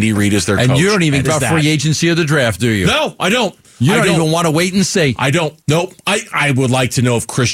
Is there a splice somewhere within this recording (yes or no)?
yes